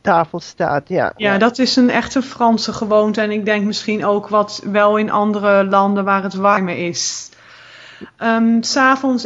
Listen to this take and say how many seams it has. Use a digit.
0